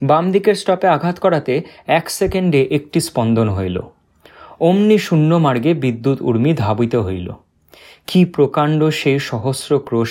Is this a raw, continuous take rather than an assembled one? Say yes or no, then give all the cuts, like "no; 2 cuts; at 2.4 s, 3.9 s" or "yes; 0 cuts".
yes; 0 cuts